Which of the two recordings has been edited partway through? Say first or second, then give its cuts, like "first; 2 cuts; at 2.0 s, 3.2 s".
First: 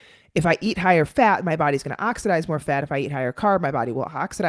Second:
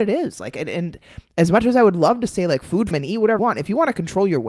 second; 2 cuts; at 2.9 s, 3.4 s